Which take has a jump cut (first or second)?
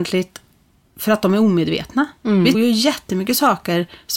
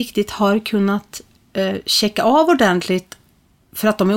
first